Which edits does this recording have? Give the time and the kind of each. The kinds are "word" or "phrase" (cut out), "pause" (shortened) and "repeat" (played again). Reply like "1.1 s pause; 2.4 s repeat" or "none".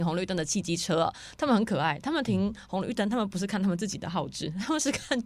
none